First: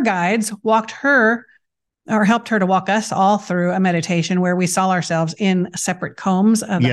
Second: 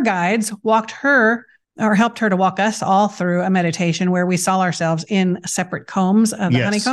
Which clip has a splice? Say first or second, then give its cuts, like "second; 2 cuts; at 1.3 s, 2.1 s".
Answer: second; 1 cut; at 1.6 s